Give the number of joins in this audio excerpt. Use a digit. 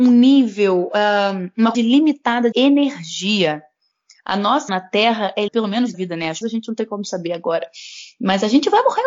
6